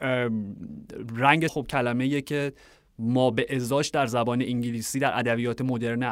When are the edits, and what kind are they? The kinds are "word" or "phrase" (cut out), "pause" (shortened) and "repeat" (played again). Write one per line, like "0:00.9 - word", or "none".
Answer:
0:01.5 - word